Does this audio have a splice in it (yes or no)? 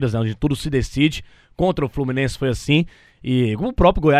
no